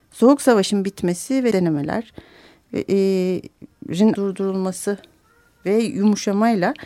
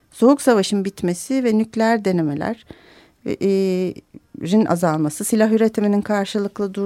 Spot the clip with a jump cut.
first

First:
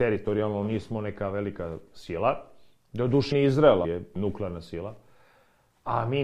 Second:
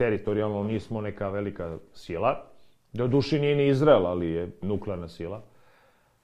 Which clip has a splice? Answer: first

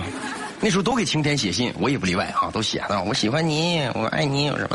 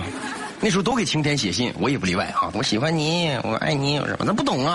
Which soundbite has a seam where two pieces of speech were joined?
second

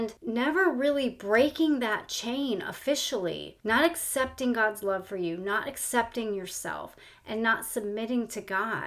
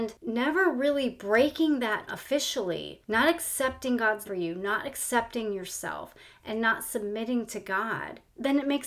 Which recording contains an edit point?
second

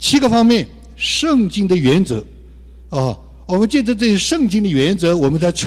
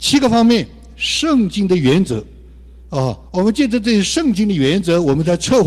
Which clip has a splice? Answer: second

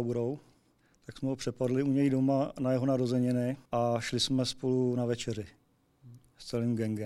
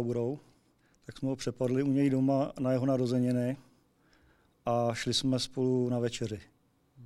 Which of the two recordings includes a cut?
first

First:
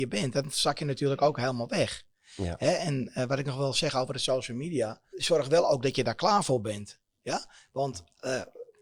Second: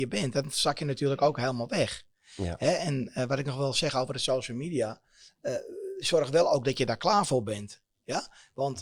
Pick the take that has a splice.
first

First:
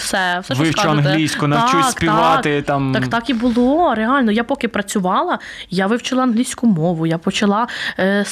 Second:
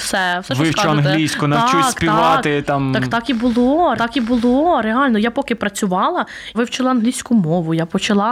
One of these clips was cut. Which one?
second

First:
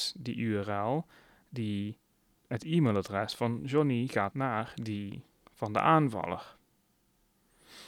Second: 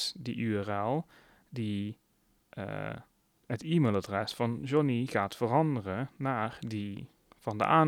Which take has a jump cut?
first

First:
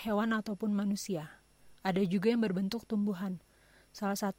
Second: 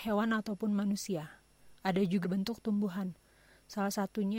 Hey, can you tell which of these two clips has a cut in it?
second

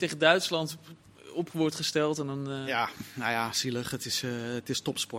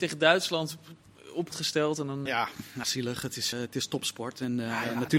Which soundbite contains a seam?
second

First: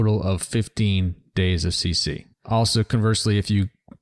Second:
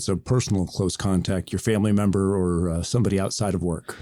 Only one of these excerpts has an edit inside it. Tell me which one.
first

